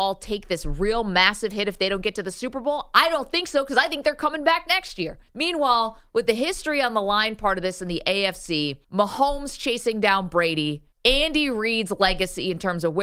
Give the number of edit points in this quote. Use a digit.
3